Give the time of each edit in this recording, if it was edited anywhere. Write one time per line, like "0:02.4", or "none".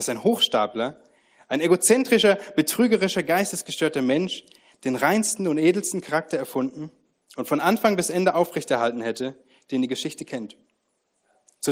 none